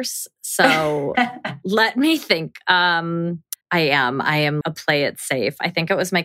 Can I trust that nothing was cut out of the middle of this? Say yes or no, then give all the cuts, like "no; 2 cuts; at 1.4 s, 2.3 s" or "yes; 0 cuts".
no; 2 cuts; at 3.6 s, 4.6 s